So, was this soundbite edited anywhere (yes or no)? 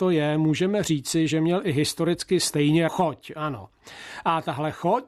yes